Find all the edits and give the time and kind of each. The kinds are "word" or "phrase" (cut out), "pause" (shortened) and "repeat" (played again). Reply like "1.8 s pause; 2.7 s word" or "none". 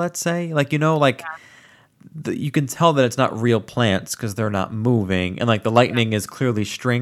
none